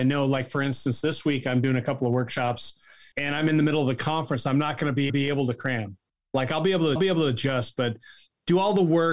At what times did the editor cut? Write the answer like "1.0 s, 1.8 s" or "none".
3.1 s, 5.1 s, 7.0 s